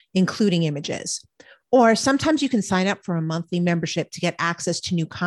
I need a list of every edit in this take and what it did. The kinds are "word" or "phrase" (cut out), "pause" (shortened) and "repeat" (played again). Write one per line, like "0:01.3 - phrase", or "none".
none